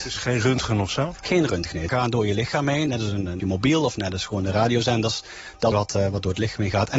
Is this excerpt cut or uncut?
cut